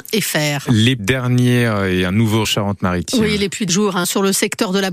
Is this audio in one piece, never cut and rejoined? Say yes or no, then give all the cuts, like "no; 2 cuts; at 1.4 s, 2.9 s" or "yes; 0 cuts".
no; 4 cuts; at 1.0 s, 2.4 s, 3.7 s, 4.0 s